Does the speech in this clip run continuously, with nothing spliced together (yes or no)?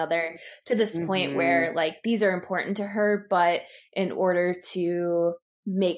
yes